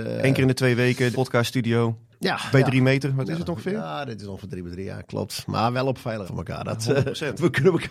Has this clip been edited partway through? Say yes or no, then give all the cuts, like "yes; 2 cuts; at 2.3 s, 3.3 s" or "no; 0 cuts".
yes; 3 cuts; at 1.1 s, 2.5 s, 6.3 s